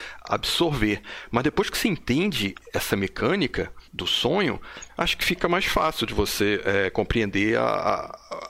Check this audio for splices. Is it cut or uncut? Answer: cut